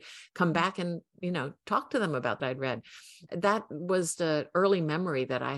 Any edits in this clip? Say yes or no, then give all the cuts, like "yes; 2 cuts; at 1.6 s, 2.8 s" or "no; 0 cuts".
yes; 2 cuts; at 2.4 s, 4.2 s